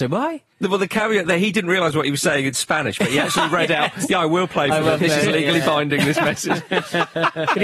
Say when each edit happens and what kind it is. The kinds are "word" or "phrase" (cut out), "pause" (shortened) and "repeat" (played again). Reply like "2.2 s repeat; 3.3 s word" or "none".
none